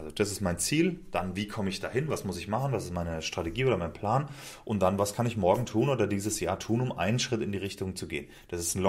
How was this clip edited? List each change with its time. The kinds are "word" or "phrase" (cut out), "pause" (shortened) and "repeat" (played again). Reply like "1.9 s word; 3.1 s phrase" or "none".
none